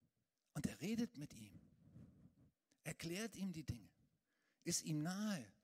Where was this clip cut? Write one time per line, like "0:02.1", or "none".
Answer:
none